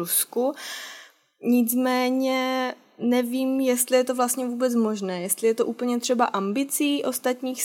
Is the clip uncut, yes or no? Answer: yes